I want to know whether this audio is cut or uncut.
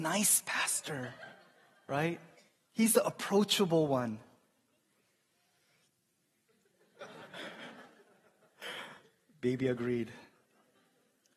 uncut